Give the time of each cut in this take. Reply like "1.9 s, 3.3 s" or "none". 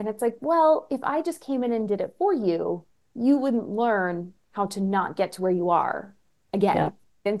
none